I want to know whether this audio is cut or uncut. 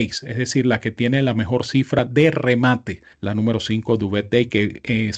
cut